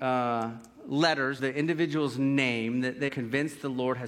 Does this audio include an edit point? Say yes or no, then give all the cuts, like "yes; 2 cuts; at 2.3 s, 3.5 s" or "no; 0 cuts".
yes; 2 cuts; at 1.4 s, 3.1 s